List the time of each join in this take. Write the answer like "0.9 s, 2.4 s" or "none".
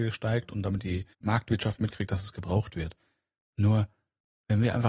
1.1 s